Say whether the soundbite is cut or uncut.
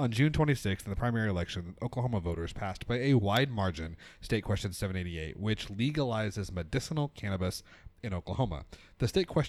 uncut